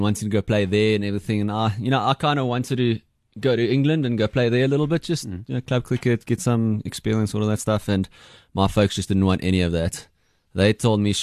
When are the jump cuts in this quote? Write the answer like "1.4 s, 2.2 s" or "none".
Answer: none